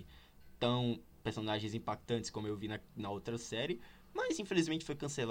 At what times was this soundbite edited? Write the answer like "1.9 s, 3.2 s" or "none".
none